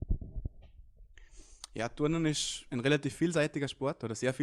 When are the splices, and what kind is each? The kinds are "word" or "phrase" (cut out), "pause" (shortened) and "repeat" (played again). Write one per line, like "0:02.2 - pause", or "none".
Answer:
none